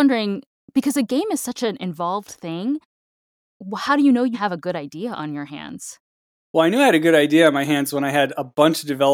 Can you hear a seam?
yes; 1 cut; at 4.3 s

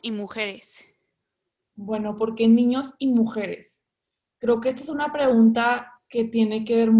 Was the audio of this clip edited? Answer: no; 0 cuts

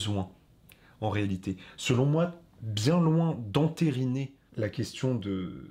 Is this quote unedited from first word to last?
yes; 0 cuts

